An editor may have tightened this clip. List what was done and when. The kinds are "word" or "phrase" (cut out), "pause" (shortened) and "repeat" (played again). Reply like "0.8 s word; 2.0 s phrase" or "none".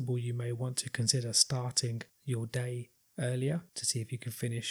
2.1 s pause; 3.7 s pause